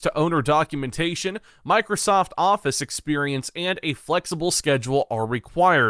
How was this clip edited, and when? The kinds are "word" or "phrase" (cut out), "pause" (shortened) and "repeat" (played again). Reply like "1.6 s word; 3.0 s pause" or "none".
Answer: none